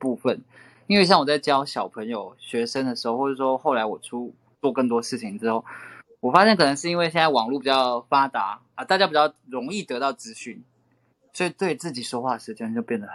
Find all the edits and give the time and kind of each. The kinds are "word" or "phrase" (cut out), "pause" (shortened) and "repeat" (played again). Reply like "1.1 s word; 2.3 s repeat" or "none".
8.8 s phrase